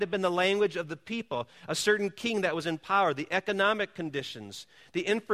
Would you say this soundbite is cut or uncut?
uncut